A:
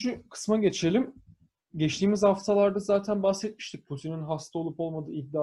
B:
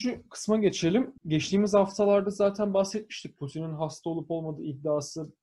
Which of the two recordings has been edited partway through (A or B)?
B